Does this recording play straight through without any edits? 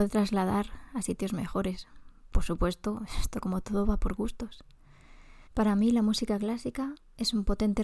no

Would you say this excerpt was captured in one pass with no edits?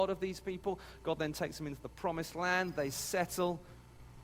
yes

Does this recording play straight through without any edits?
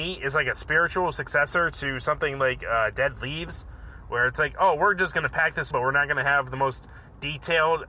no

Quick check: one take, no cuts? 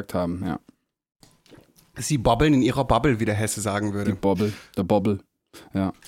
yes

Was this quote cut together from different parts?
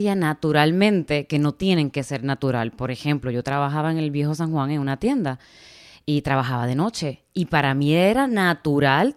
no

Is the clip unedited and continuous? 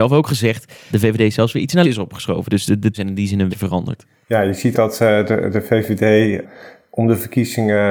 no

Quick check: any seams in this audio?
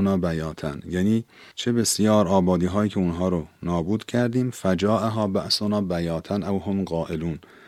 no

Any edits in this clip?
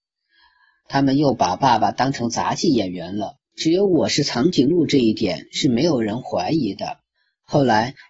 yes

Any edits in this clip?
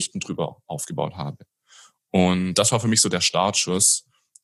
no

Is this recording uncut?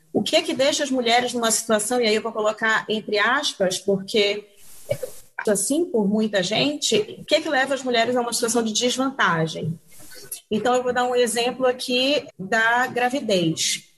no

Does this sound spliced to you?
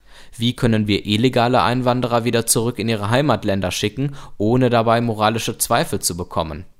no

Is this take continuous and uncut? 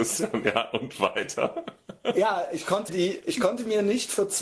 no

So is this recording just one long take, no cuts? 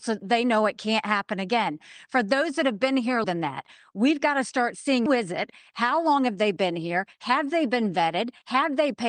no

